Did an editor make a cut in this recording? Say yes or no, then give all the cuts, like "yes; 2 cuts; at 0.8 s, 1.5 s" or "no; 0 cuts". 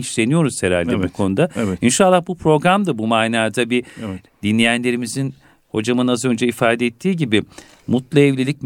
no; 0 cuts